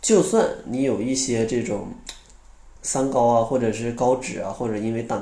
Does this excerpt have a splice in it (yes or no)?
yes